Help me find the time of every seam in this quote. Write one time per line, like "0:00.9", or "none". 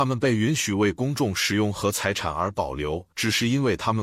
0:03.1